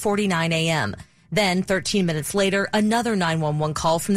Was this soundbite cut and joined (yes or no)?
no